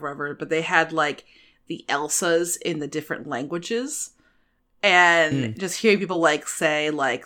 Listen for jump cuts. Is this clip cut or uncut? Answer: uncut